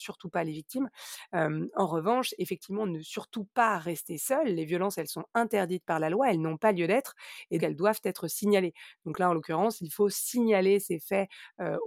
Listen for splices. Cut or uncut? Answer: cut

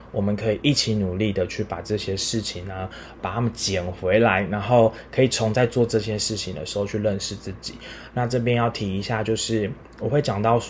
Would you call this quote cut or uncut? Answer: cut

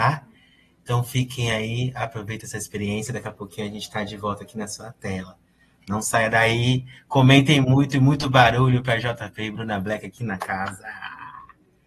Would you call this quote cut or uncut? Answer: uncut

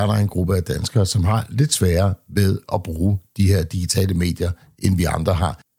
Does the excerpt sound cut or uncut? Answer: uncut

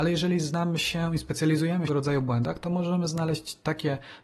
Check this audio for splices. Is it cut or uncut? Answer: cut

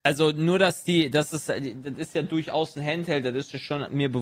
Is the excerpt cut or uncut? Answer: uncut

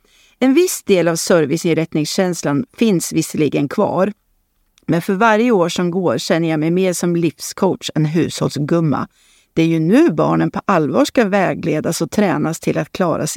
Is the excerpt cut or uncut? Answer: uncut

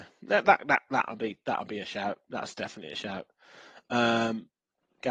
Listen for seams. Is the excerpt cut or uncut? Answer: uncut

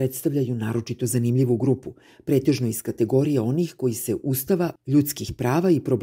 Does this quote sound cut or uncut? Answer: uncut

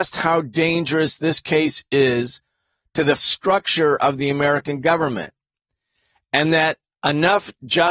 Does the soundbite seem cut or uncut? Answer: cut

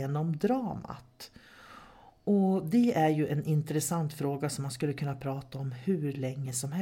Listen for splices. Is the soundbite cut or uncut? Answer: uncut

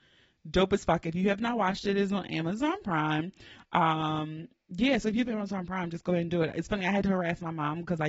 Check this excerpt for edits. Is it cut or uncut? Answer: uncut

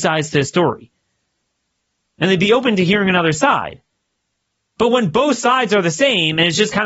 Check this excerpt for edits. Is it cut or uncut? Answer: uncut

